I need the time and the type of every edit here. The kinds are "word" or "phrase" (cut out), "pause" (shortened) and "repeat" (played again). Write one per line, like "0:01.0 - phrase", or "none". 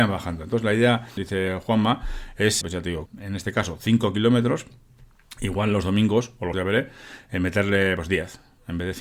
0:01.2 - phrase
0:02.6 - word
0:03.1 - phrase
0:06.5 - word